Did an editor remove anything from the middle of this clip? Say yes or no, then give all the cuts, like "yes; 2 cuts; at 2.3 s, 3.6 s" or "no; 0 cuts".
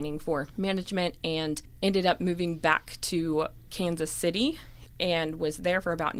no; 0 cuts